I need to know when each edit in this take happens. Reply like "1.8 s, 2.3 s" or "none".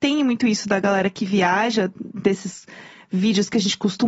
none

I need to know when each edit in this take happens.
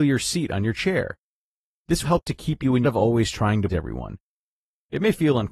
2.0 s, 2.8 s, 3.7 s

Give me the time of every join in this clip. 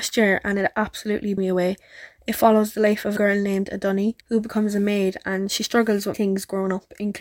1.4 s, 3.2 s, 4.2 s, 6.1 s

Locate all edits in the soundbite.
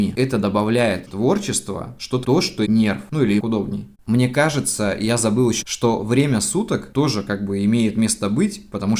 1.1 s, 2.2 s, 2.6 s, 3.4 s, 3.9 s, 5.6 s

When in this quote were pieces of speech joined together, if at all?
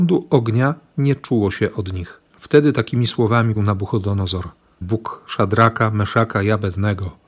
2.3 s, 3.6 s, 4.8 s

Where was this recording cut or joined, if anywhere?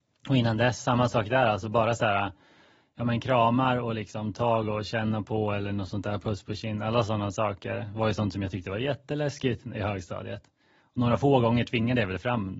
none

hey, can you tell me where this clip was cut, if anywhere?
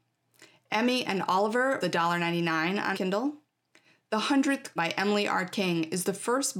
1.8 s, 2.9 s, 4.8 s

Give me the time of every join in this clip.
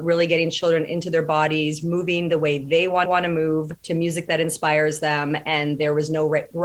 3.1 s, 3.8 s

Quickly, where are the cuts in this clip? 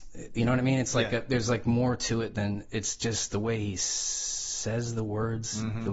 none

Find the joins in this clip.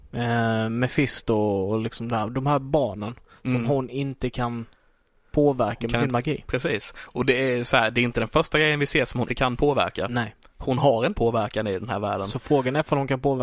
9.3 s, 11.1 s

